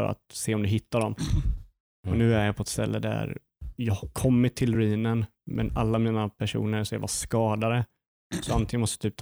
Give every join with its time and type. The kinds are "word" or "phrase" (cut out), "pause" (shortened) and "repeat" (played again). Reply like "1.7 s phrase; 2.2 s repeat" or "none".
none